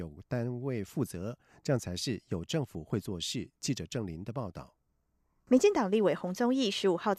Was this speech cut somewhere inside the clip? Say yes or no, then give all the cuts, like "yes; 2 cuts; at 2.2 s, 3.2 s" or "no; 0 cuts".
no; 0 cuts